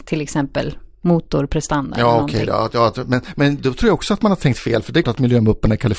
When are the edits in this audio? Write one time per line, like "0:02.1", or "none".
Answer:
0:05.0